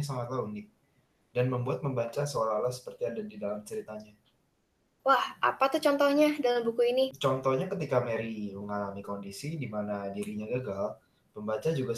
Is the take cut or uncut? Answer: uncut